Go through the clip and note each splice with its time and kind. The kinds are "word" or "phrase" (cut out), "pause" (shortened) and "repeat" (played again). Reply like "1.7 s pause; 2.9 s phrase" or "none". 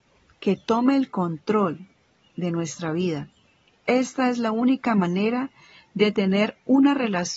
none